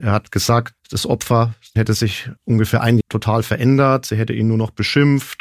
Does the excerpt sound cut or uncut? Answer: cut